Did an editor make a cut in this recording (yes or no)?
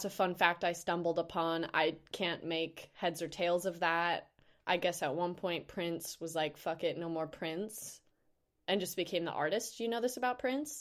no